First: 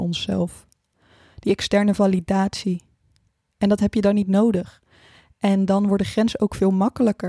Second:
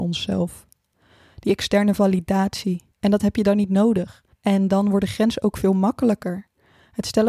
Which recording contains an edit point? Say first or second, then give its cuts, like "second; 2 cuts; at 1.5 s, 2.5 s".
second; 2 cuts; at 2.9 s, 4.3 s